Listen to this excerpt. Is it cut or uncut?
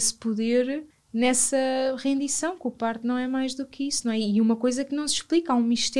cut